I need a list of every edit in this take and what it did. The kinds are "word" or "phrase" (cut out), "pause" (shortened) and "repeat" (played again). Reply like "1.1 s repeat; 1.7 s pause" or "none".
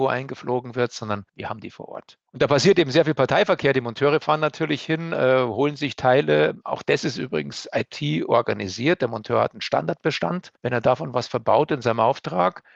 1.3 s pause; 2.3 s pause; 10.6 s pause